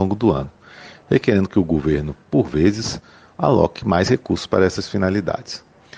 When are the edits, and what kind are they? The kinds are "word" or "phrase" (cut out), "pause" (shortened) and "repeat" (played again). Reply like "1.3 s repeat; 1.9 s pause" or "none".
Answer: none